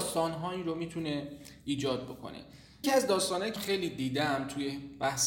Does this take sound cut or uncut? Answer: cut